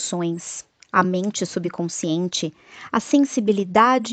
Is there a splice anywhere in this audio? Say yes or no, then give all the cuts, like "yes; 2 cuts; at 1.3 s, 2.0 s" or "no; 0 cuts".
no; 0 cuts